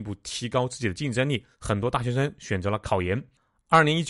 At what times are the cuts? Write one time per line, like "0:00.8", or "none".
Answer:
0:01.5